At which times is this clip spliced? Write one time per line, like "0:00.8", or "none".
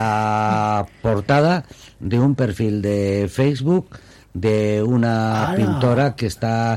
none